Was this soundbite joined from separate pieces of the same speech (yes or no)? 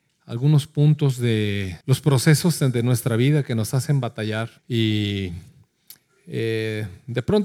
yes